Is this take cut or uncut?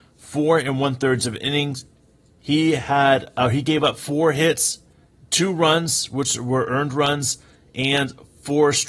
uncut